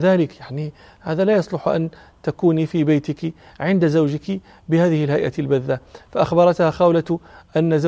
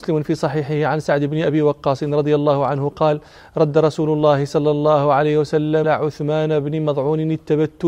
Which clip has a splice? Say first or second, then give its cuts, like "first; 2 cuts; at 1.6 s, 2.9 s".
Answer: second; 1 cut; at 5.8 s